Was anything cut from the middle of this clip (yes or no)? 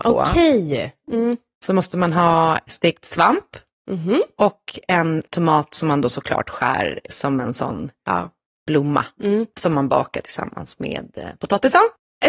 no